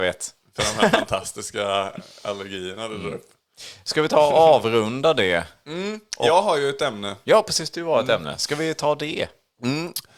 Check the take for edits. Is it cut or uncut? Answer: uncut